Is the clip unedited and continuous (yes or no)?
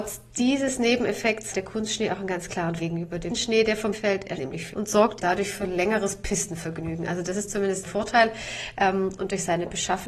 no